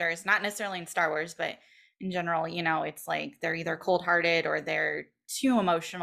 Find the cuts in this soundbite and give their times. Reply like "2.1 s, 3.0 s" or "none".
none